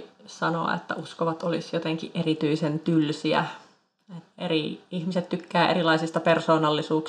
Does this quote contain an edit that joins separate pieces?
yes; 1 cut; at 4.3 s

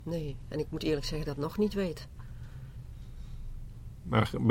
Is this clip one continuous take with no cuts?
no; 1 cut; at 1.2 s

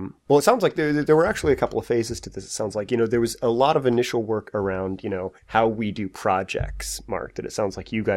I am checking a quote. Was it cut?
yes; 1 cut; at 5.4 s

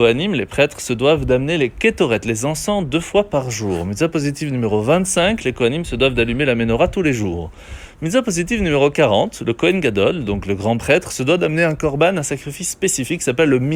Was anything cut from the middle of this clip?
no; 0 cuts

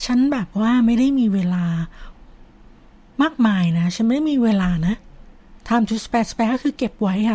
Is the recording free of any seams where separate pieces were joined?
yes; 0 cuts

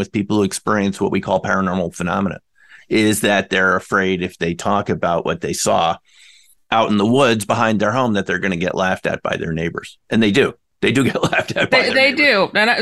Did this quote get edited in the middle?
no; 0 cuts

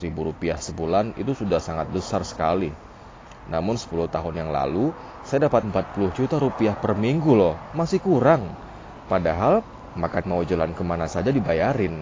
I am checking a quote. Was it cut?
yes; 2 cuts; at 5.6 s, 10.2 s

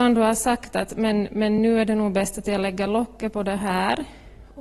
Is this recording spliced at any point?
no; 0 cuts

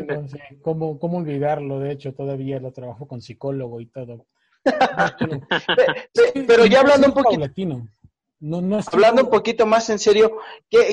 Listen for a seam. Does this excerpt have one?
no; 0 cuts

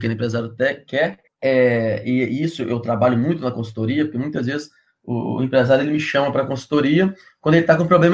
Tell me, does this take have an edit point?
no; 0 cuts

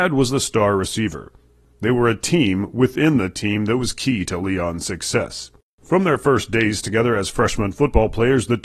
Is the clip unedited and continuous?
yes; 0 cuts

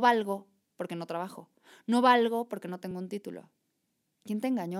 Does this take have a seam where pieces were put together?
no; 0 cuts

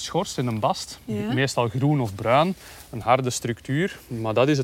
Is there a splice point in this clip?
no; 0 cuts

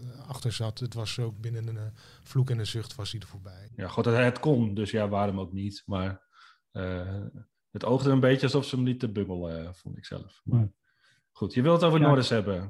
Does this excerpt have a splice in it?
no; 0 cuts

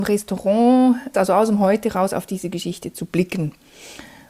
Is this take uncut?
no; 1 cut; at 1.1 s

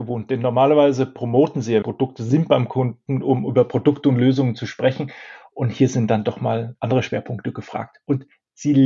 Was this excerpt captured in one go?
no; 2 cuts; at 1.8 s, 6.8 s

